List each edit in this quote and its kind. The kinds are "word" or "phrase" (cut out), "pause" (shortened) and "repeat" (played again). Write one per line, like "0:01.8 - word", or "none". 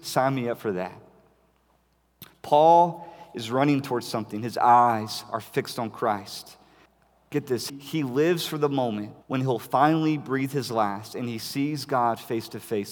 0:06.9 - pause
0:07.7 - word
0:09.2 - pause